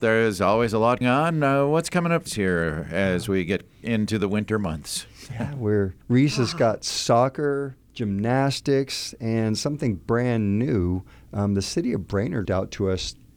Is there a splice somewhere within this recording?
yes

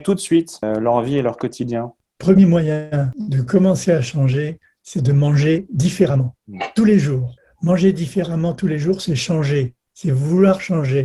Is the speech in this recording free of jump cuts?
yes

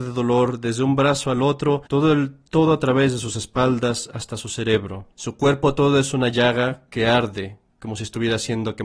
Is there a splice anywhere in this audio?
yes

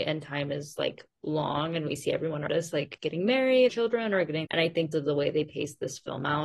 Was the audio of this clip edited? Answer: yes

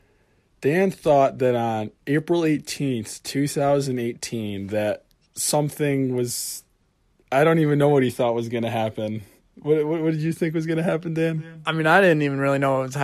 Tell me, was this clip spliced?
no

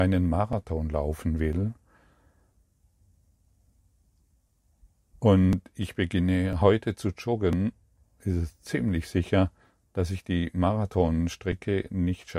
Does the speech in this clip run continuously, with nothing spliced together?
yes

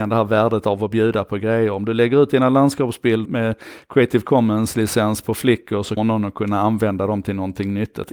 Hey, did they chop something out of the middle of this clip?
yes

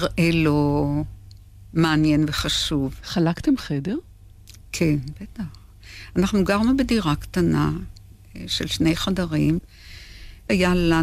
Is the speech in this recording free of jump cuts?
yes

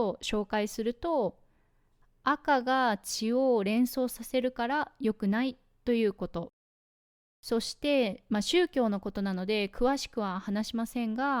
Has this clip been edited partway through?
no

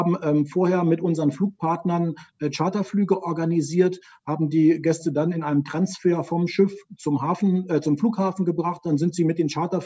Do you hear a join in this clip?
no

